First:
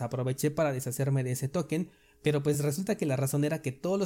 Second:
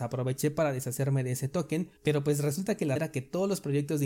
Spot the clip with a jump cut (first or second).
second